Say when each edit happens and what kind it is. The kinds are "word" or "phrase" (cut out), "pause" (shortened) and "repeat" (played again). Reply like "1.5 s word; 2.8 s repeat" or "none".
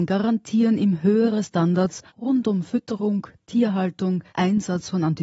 2.1 s pause; 4.3 s pause